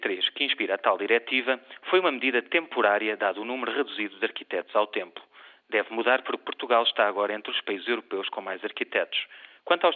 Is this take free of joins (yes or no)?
yes